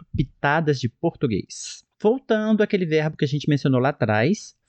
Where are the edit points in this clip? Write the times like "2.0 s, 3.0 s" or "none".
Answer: 1.9 s